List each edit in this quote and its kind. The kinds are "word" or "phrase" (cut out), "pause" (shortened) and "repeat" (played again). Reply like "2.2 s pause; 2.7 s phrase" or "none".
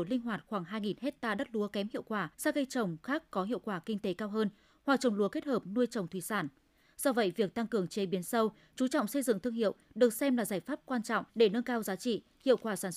2.3 s pause; 11.3 s pause